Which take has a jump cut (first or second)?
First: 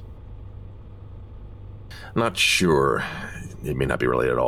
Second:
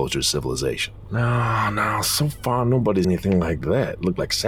second